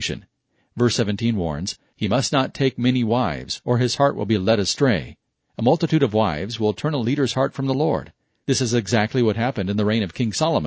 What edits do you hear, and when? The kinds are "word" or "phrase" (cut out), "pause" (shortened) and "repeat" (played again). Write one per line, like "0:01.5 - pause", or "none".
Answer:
none